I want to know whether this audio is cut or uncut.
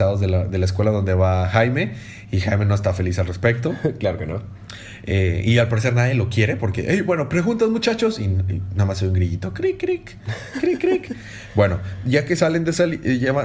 uncut